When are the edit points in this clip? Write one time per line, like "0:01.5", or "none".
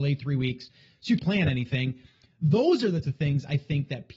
0:01.2
0:03.0